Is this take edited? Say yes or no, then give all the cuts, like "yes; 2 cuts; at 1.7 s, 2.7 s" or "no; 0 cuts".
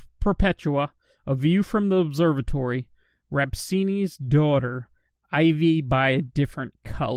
no; 0 cuts